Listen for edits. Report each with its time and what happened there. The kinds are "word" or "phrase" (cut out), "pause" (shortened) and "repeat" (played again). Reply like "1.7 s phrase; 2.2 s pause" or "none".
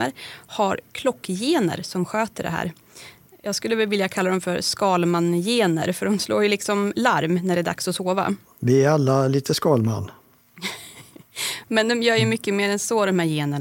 none